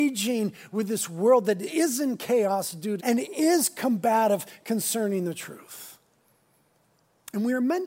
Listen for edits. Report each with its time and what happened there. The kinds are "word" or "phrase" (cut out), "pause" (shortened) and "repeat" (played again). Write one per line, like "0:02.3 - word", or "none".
0:03.0 - word